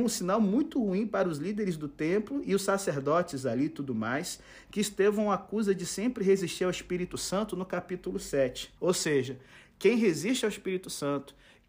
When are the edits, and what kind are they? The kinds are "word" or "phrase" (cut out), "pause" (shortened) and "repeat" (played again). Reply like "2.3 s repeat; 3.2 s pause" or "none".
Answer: 8.8 s pause